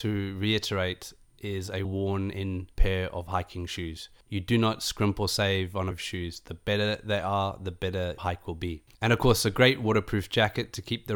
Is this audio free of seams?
no; 5 cuts; at 1.8 s, 2.7 s, 5.9 s, 8.2 s, 8.9 s

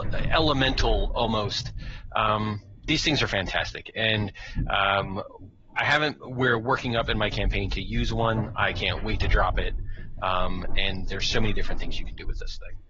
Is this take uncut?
yes; 0 cuts

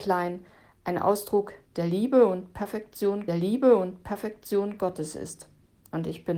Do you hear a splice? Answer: yes; 1 cut; at 3.3 s

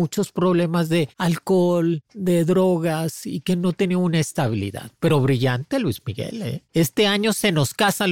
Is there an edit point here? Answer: no; 0 cuts

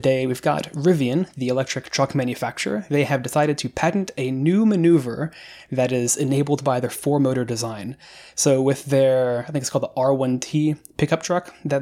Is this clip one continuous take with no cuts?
yes; 0 cuts

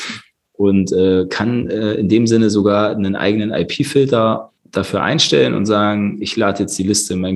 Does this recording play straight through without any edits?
no; 1 cut; at 4.6 s

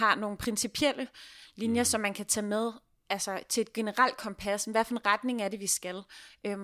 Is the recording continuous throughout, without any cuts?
yes; 0 cuts

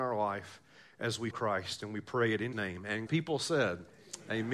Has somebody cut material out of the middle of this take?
yes; 3 cuts; at 1.3 s, 2.5 s, 3.1 s

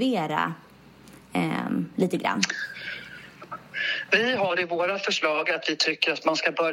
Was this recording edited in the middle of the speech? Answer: no; 0 cuts

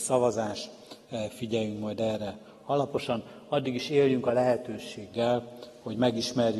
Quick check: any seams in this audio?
no; 0 cuts

